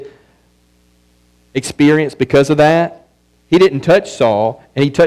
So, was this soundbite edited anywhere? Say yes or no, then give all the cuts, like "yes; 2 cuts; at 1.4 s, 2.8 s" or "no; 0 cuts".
no; 0 cuts